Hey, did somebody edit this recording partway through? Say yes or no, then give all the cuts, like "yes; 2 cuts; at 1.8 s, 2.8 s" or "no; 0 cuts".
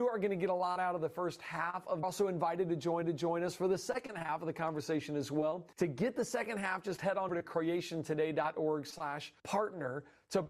yes; 5 cuts; at 2.0 s, 3.0 s, 5.7 s, 7.3 s, 9.4 s